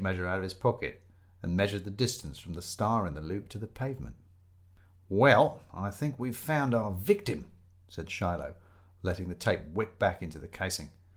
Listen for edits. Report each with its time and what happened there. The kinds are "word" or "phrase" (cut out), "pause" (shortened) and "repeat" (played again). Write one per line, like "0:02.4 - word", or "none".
none